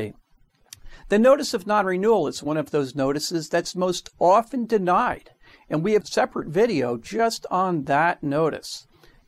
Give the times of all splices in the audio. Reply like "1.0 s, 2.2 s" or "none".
none

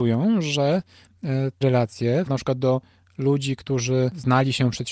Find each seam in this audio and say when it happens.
1.6 s, 2.3 s

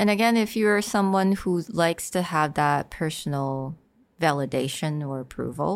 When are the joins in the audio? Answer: none

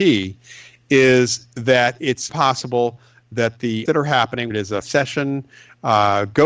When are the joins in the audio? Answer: 2.3 s, 3.9 s, 4.5 s, 4.8 s

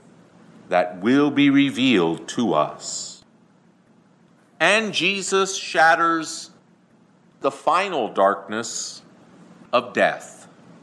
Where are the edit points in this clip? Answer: none

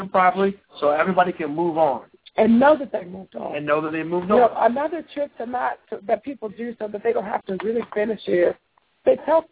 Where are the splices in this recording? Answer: none

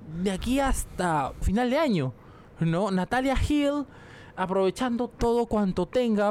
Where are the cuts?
1.4 s, 5.1 s

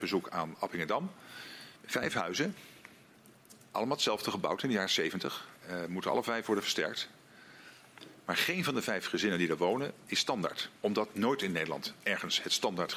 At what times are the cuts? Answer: 1.8 s, 10.8 s

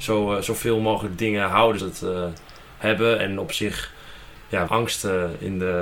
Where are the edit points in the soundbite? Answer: 1.8 s, 4.7 s

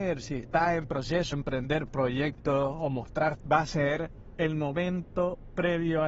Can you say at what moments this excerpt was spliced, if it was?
1.3 s, 3.4 s

